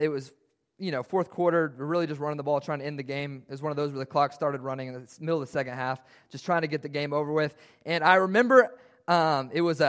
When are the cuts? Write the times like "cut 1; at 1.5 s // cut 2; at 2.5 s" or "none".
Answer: none

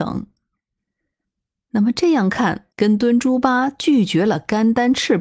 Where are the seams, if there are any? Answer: cut 1; at 2.7 s

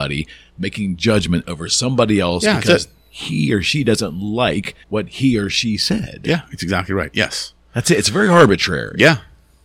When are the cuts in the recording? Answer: cut 1; at 4.8 s

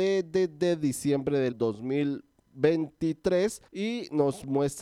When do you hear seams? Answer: cut 1; at 1.5 s // cut 2; at 3.7 s

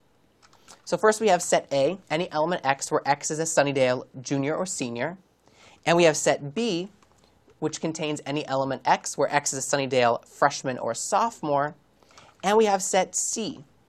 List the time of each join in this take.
cut 1; at 2.0 s

